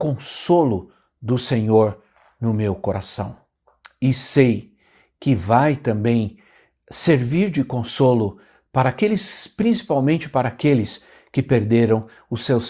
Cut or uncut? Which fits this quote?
uncut